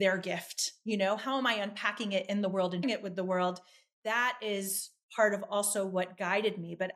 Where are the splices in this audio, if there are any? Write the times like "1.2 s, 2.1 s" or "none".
2.8 s